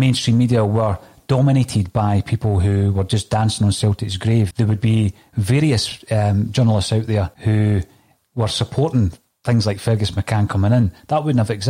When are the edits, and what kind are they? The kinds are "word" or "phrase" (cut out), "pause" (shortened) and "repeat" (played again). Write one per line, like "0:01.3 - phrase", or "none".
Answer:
0:04.5 - word
0:07.3 - pause